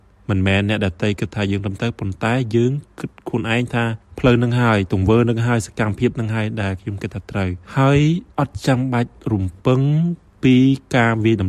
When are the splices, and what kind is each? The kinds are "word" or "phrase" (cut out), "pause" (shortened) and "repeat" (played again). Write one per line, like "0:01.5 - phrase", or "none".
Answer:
0:07.6 - pause
0:08.3 - pause